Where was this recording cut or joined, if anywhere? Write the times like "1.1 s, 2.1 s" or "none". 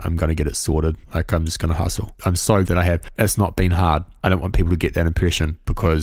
1.0 s, 2.6 s

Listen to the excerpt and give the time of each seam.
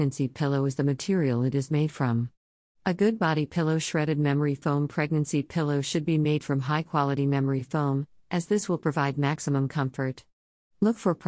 none

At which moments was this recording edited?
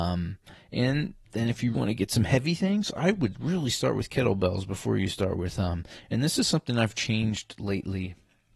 1.2 s, 1.7 s

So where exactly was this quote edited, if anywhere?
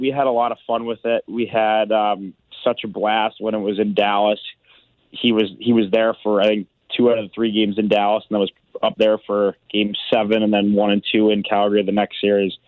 none

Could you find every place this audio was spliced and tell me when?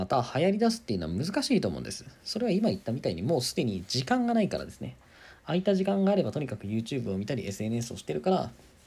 none

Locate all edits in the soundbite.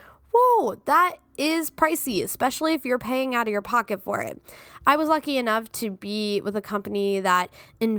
none

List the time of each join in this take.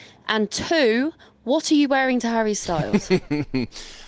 none

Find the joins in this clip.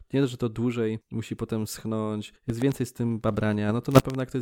1.0 s, 2.4 s

